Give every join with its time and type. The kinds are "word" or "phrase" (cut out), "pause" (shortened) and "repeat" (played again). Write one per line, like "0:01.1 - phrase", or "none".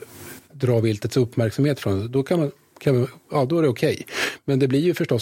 none